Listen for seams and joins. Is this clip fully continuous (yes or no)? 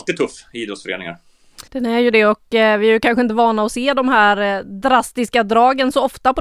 no